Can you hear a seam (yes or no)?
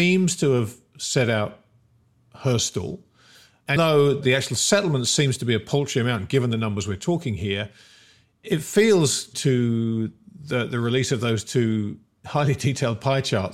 yes